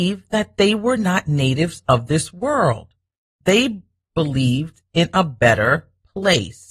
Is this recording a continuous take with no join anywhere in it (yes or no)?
yes